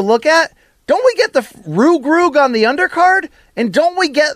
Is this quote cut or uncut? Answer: uncut